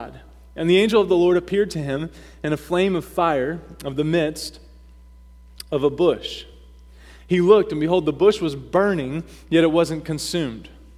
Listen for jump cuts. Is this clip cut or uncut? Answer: uncut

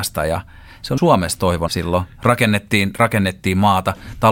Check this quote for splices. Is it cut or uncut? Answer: cut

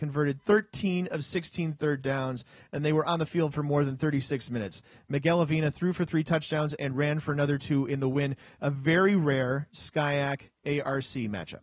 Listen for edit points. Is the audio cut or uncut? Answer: uncut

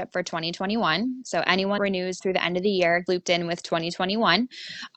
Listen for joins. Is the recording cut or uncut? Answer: cut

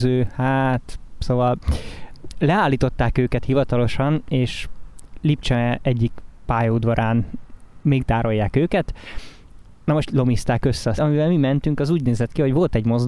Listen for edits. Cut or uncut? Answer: cut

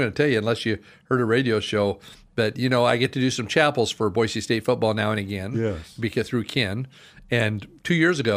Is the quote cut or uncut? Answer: uncut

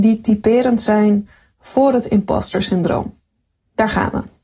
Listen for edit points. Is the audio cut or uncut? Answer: uncut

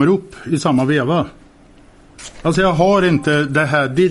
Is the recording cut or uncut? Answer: uncut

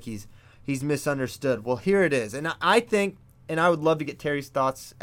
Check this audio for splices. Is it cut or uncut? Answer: uncut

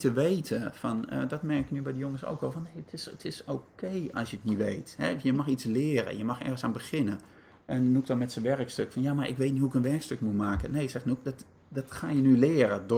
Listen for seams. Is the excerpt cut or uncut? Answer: uncut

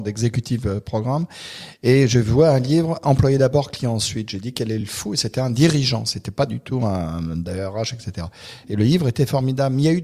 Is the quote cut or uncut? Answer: uncut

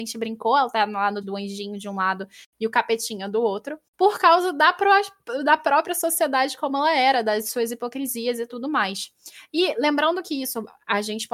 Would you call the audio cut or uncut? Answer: cut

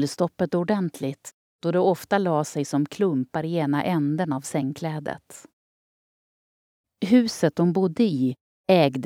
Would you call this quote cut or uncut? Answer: uncut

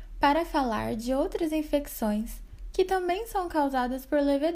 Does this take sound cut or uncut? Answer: uncut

